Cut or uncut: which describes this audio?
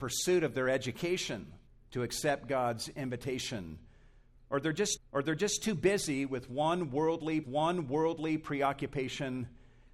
cut